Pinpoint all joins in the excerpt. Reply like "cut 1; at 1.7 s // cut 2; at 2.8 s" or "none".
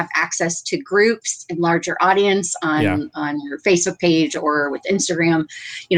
none